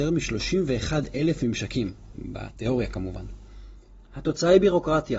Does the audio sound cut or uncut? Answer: uncut